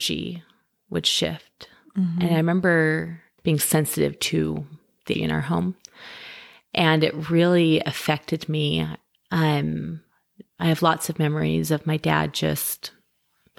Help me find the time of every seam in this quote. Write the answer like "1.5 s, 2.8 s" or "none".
3.4 s, 5.1 s